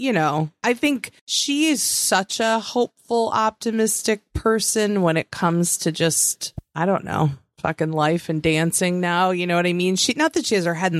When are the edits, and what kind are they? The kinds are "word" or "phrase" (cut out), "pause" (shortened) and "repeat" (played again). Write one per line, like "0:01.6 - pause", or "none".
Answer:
0:01.2 - pause